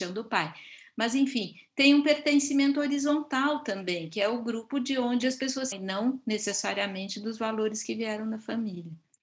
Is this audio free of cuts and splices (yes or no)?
no